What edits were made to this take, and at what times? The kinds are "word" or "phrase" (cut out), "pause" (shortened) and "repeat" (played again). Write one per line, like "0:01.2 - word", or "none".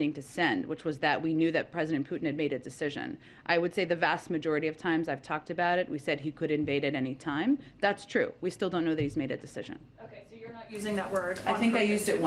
none